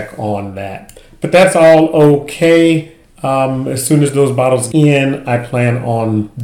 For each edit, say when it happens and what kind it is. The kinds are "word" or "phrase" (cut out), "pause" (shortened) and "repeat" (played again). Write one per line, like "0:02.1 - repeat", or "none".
0:04.7 - word